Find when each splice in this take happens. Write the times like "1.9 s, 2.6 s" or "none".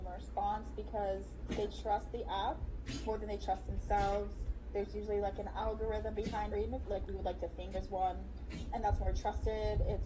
6.5 s, 6.8 s, 7.7 s

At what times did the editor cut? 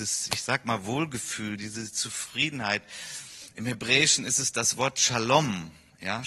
none

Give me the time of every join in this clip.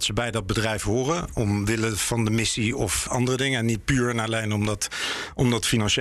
3.1 s

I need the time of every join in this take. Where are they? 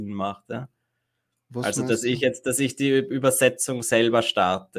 none

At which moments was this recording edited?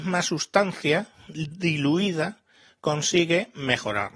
none

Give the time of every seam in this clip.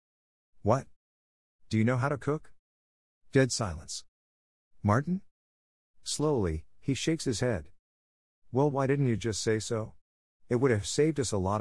none

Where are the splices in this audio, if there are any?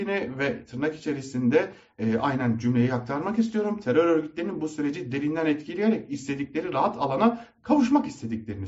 none

